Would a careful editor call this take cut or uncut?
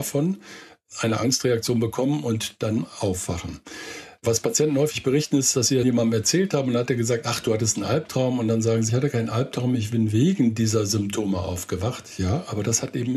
cut